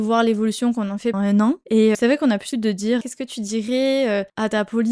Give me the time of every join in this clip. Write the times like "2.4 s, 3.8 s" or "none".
1.1 s, 1.9 s, 2.5 s, 3.0 s